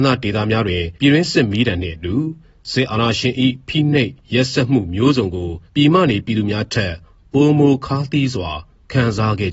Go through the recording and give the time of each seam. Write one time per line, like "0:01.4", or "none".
0:01.0
0:05.7